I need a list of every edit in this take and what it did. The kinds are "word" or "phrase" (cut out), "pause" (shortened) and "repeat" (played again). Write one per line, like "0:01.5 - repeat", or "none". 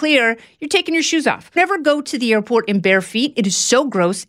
0:01.6 - word